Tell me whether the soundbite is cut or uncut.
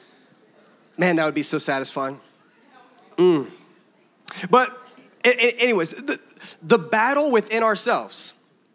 uncut